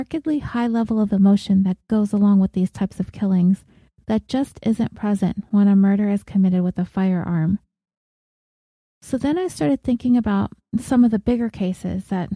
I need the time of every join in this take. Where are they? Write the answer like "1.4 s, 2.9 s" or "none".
none